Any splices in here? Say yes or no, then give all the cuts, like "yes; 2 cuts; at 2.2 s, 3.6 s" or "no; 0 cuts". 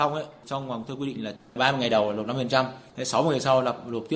no; 0 cuts